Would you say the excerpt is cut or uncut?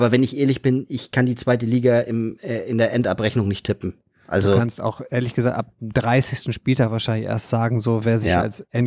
uncut